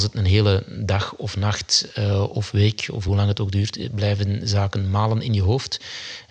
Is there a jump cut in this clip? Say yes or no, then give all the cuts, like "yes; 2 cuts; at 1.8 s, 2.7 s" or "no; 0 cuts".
no; 0 cuts